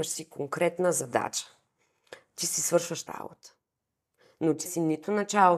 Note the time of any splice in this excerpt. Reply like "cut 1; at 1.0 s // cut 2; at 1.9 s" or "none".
cut 1; at 3.1 s // cut 2; at 4.7 s